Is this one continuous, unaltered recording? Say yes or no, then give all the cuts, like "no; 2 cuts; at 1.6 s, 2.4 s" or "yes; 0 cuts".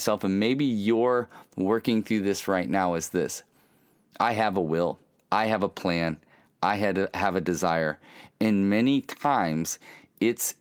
yes; 0 cuts